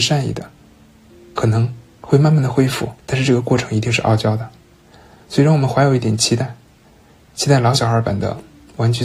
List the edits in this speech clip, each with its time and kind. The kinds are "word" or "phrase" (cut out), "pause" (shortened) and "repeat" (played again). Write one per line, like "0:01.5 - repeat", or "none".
0:03.0 - pause